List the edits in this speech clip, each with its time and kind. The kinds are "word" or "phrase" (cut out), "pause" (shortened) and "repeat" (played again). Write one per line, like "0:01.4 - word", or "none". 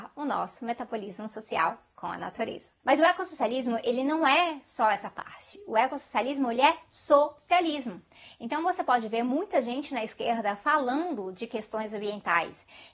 none